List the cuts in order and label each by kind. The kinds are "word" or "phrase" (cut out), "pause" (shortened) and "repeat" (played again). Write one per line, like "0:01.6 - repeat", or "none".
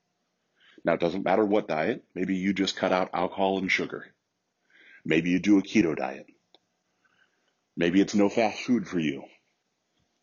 none